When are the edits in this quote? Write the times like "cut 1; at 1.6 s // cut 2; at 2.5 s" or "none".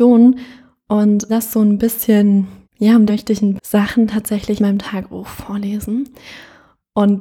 cut 1; at 1.3 s // cut 2; at 2.6 s // cut 3; at 3.1 s // cut 4; at 3.6 s // cut 5; at 4.6 s